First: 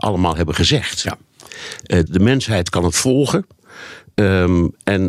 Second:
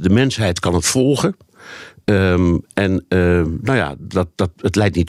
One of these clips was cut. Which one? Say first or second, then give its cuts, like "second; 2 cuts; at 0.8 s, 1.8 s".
first; 1 cut; at 2.1 s